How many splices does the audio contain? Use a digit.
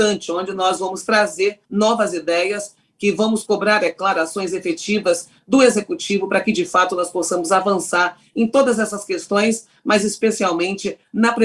1